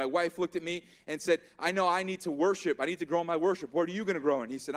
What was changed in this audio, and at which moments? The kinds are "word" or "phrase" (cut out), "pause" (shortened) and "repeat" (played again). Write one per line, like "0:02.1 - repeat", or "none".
none